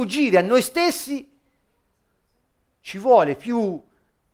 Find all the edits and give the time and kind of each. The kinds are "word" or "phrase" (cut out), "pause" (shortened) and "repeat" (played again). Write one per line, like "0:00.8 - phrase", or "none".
none